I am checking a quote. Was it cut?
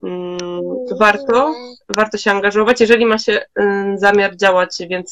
no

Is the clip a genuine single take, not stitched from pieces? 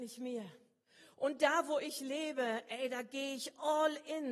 yes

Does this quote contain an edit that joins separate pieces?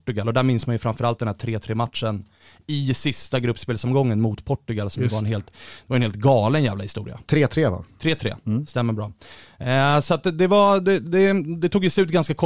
no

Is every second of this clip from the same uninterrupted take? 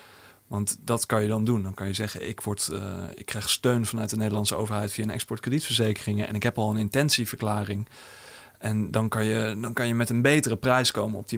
yes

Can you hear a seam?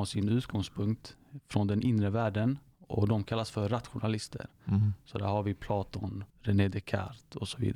yes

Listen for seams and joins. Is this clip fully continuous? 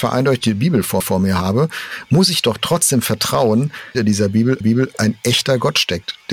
no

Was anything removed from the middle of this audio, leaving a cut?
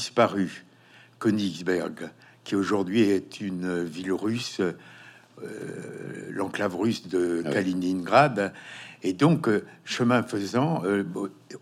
no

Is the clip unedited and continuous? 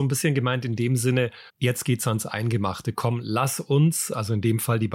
no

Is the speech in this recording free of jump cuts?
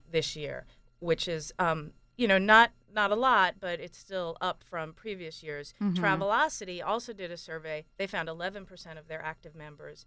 yes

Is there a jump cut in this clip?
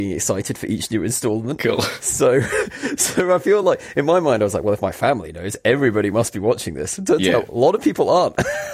no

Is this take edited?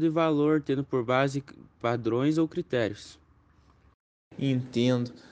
no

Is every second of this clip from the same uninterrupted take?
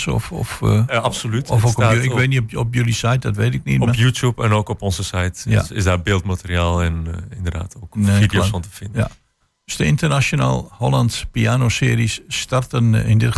yes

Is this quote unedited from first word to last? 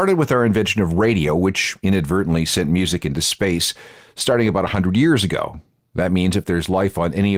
yes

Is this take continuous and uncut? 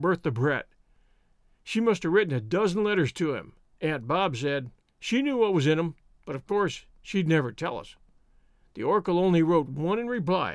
no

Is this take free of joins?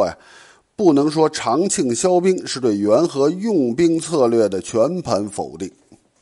yes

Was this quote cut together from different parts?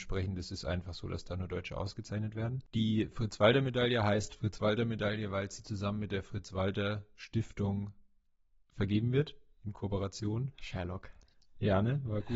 no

